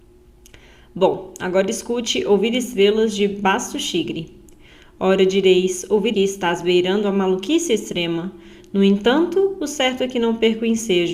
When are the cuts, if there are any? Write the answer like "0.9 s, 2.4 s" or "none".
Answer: 6.1 s

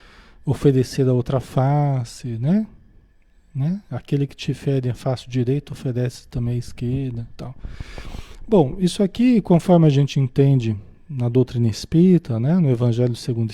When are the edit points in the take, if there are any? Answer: none

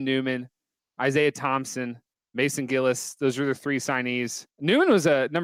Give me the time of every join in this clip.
2.1 s, 4.5 s

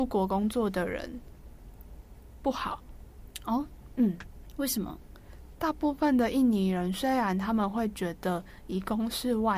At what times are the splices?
none

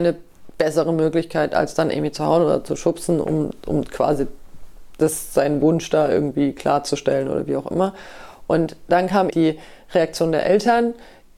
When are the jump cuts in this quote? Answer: 3.2 s, 9.3 s

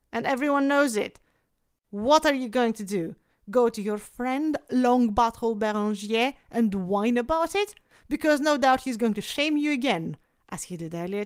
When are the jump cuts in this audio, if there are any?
none

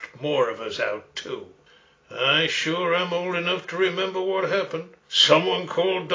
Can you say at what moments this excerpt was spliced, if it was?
1.7 s, 5.0 s

